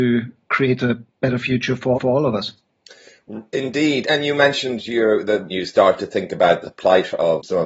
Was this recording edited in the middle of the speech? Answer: yes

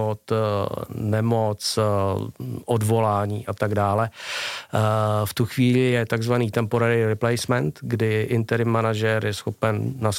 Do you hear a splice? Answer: no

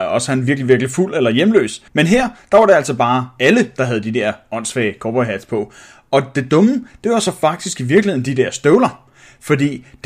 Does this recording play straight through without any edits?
no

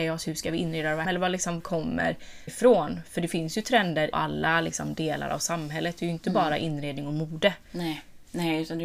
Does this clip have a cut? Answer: yes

